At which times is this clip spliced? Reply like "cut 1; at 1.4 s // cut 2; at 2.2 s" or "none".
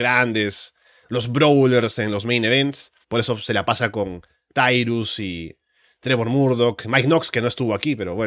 cut 1; at 3.0 s